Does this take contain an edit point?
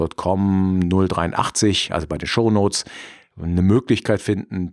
no; 0 cuts

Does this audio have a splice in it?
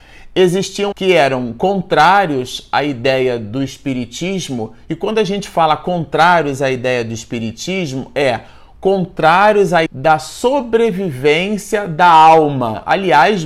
yes; 2 cuts; at 0.9 s, 9.9 s

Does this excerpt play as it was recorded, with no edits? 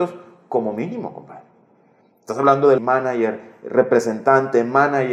no; 1 cut; at 2.8 s

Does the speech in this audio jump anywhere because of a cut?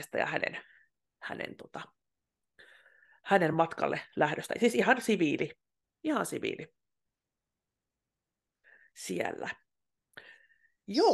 no; 0 cuts

